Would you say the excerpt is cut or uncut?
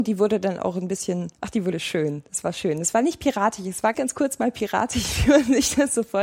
cut